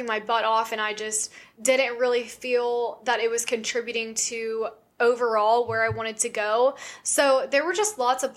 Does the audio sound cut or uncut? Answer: uncut